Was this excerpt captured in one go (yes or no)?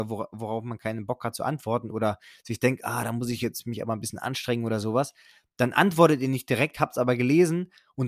yes